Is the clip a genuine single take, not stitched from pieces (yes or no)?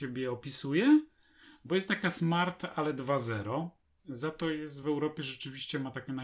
yes